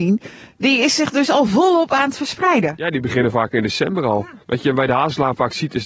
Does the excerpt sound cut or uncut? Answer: cut